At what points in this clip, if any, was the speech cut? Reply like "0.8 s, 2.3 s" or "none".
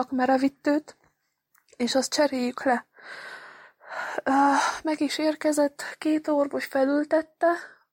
none